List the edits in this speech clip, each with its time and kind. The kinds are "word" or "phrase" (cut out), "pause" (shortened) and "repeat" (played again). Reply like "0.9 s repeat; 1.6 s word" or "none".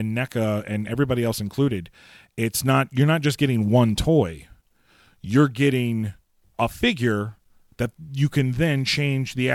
none